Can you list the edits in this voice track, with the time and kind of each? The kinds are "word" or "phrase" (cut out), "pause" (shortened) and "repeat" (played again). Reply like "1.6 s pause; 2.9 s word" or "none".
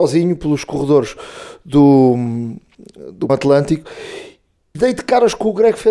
3.3 s word; 4.7 s word